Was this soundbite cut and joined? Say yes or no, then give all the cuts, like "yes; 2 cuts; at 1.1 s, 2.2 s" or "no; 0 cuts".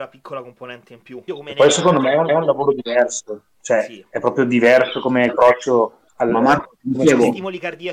yes; 4 cuts; at 1.3 s, 2.3 s, 5.3 s, 6.1 s